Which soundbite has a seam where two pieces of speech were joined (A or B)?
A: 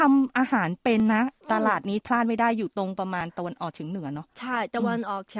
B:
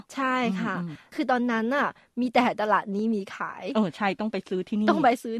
A